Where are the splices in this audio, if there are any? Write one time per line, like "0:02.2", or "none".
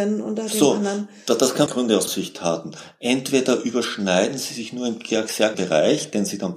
0:01.7
0:02.1
0:05.5